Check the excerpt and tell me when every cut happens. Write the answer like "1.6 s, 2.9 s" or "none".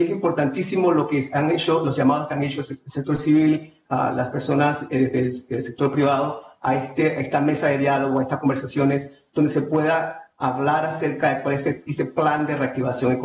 none